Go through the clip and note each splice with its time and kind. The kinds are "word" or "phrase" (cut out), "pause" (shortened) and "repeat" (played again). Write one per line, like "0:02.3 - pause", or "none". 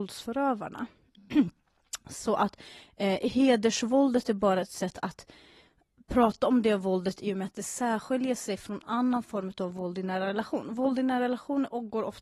none